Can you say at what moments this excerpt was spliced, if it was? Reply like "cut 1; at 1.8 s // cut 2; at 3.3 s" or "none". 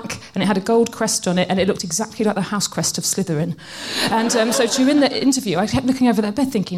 none